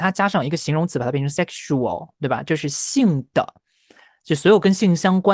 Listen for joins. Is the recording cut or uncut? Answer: uncut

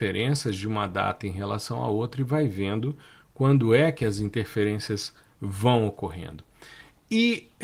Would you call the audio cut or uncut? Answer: uncut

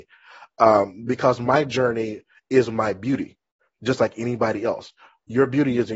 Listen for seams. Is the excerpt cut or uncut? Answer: uncut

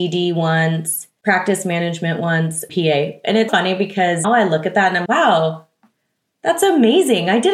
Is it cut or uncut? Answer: cut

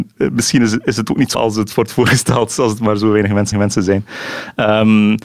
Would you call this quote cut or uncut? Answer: cut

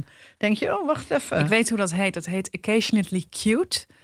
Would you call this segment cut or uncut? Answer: uncut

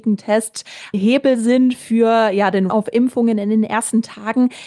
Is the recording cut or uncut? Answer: cut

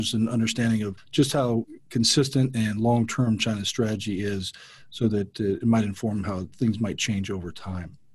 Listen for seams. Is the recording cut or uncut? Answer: uncut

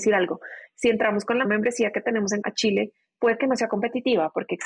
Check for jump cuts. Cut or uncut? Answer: cut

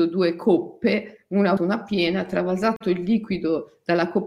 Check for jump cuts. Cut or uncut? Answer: cut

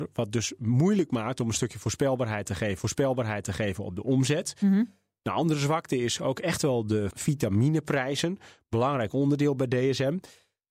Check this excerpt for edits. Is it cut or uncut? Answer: cut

